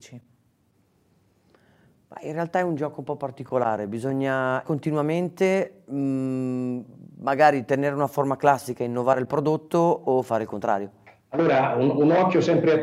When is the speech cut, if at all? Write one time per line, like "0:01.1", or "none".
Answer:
0:04.6